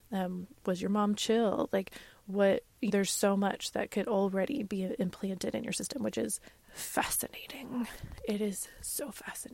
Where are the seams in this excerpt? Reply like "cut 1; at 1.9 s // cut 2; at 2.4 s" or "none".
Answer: cut 1; at 2.9 s // cut 2; at 6.5 s